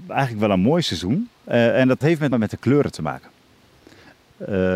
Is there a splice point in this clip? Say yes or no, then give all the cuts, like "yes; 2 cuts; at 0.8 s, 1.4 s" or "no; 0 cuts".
yes; 2 cuts; at 2.0 s, 2.3 s